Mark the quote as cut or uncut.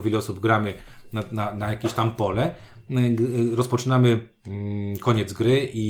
uncut